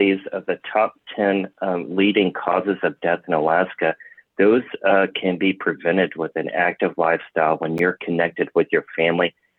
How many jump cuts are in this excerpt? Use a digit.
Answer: 0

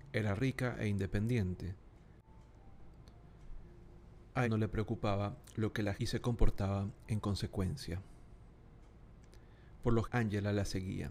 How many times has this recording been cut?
3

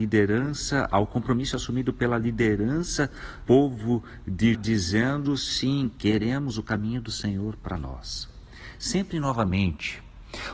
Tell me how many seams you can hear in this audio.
2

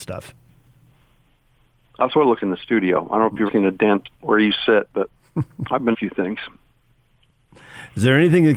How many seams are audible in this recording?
5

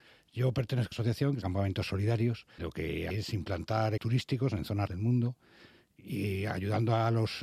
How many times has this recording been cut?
6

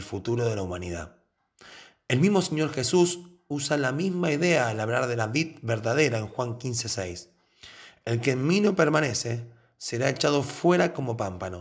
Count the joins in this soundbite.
0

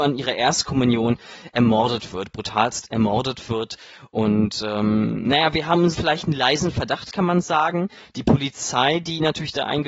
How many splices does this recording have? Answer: 1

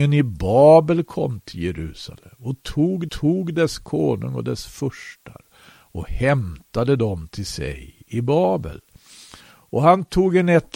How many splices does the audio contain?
2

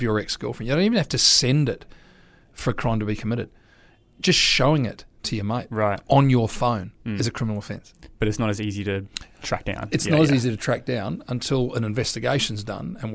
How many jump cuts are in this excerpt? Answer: 0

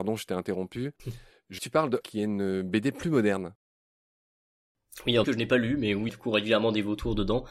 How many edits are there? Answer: 4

